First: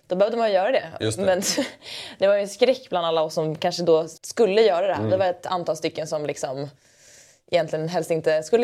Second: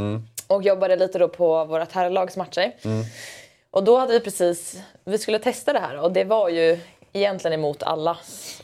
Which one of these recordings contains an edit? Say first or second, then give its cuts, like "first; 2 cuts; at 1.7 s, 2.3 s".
first; 1 cut; at 4.2 s